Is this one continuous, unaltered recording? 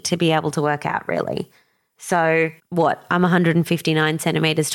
no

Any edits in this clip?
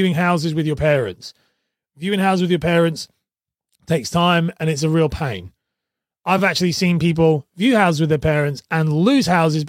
no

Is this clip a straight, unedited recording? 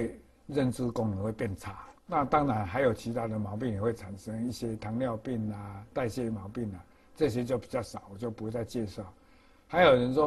no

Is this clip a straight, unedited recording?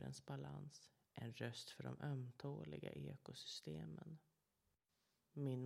yes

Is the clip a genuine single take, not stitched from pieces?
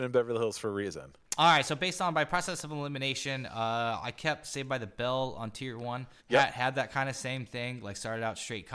no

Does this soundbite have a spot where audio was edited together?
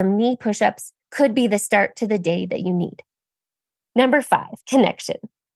yes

